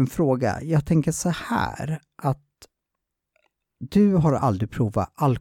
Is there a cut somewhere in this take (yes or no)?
no